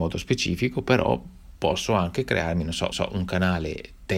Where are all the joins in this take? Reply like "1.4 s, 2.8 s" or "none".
2.9 s